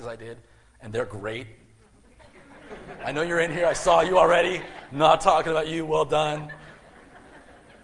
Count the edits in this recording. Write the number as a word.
zero